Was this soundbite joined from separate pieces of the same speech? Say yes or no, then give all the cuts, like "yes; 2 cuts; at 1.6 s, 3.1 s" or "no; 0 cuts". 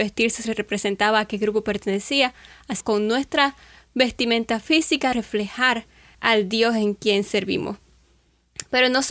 yes; 3 cuts; at 2.8 s, 5.1 s, 6.1 s